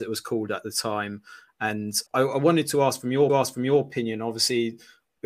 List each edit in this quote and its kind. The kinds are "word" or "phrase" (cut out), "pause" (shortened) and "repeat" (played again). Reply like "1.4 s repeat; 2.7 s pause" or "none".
2.1 s pause; 3.3 s repeat